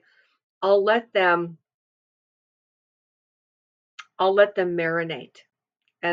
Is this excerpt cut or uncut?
uncut